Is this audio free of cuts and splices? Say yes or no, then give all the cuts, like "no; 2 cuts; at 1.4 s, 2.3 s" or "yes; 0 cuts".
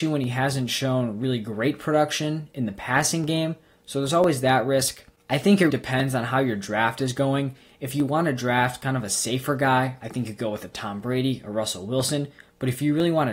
no; 1 cut; at 5.7 s